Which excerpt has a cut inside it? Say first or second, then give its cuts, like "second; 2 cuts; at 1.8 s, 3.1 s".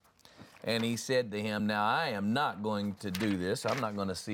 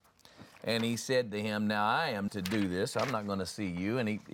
second; 1 cut; at 2.3 s